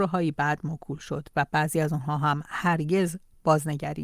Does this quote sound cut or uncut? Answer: uncut